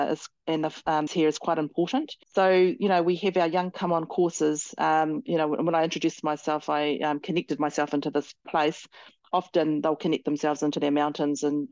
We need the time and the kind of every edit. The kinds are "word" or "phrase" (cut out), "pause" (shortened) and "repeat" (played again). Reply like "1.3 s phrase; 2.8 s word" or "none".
1.1 s phrase; 2.2 s pause; 3.7 s word